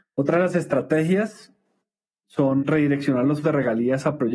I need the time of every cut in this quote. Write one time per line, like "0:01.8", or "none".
0:02.6
0:03.4

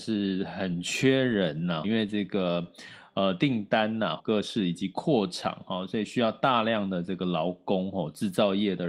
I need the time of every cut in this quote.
0:01.8
0:04.2

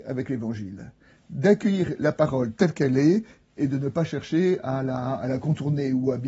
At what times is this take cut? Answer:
none

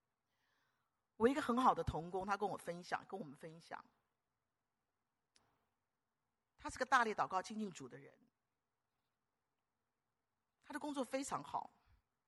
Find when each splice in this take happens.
none

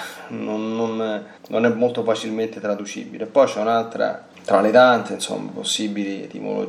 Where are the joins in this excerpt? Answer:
0:01.4
0:04.3

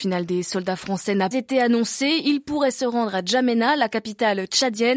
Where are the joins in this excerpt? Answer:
0:01.3

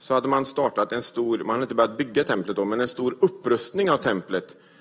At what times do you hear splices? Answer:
none

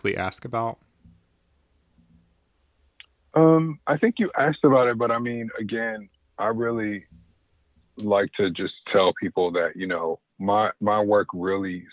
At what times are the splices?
0:03.8

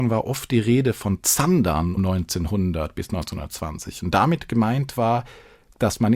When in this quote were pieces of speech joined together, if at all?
0:02.0

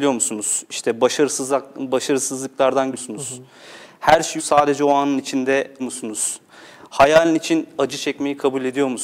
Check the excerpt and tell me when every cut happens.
0:02.9
0:04.4
0:05.8

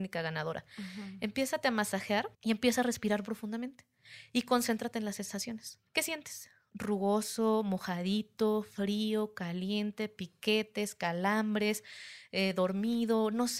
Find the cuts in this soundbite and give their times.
0:02.3
0:05.9

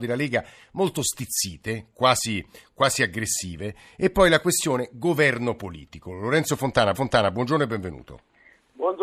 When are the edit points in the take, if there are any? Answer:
0:06.9

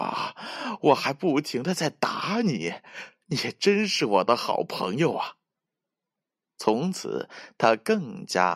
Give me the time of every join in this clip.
none

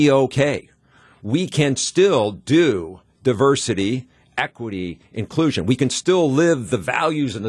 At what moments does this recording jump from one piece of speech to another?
none

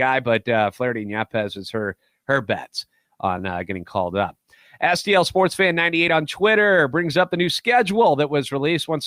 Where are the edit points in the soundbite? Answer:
none

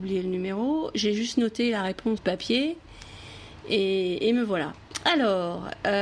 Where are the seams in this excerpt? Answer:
0:02.2

